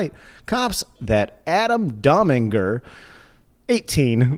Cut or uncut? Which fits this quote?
cut